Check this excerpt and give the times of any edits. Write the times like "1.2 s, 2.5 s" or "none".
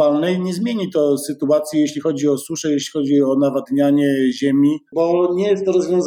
4.9 s